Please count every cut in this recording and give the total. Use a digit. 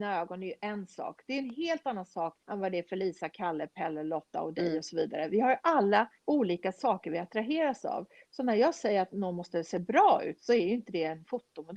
2